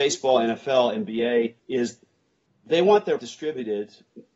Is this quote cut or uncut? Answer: cut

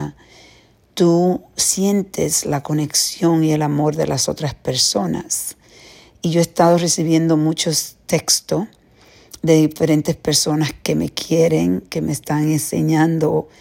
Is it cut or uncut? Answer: uncut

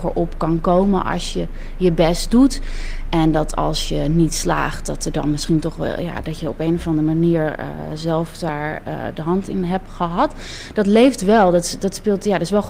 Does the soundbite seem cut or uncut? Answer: uncut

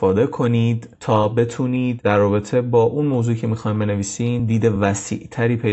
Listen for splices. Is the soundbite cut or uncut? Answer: uncut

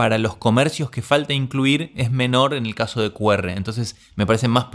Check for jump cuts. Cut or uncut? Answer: uncut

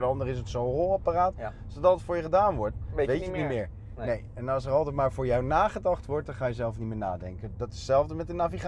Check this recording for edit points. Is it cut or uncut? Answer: uncut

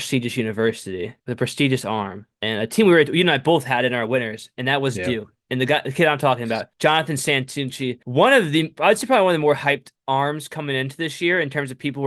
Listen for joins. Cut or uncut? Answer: cut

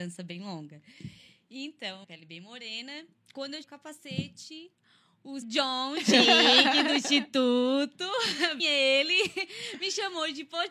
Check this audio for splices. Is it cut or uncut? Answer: cut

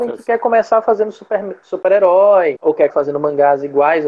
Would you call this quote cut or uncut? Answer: cut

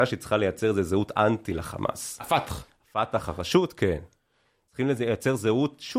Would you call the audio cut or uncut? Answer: uncut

